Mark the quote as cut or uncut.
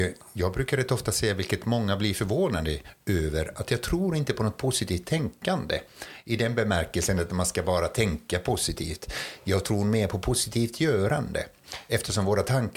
uncut